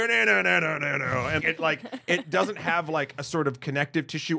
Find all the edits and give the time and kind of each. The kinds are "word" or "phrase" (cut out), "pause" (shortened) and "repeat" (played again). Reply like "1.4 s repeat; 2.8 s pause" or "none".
1.4 s word